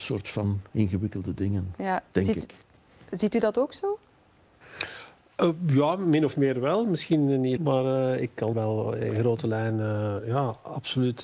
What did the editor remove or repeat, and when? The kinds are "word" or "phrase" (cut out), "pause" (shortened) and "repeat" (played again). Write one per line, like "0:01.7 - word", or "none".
0:07.6 - word
0:08.5 - word